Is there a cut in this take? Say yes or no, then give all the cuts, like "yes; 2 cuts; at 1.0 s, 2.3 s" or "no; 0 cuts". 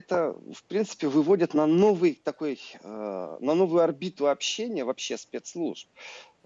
no; 0 cuts